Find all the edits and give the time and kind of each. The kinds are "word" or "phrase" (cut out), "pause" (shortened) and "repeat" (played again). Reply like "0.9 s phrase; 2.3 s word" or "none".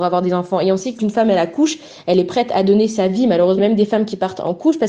1.0 s word; 3.6 s phrase